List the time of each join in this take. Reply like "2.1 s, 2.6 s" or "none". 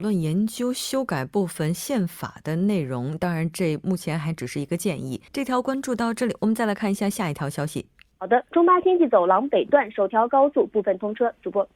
5.3 s, 8.1 s, 8.5 s